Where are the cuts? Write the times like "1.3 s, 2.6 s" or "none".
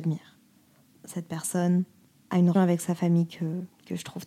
0.9 s, 2.5 s